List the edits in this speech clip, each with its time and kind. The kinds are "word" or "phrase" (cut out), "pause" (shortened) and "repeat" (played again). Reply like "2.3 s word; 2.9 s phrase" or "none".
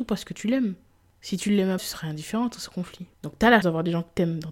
1.8 s word; 3.1 s pause; 3.6 s word